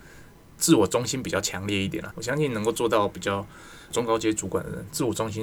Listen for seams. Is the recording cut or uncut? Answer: cut